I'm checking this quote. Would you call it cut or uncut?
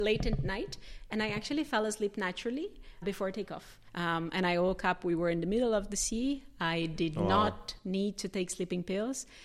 cut